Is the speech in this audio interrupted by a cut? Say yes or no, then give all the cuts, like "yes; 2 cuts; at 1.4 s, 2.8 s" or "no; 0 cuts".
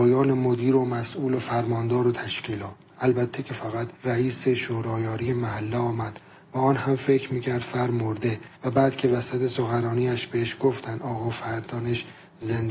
yes; 2 cuts; at 3.9 s, 8.6 s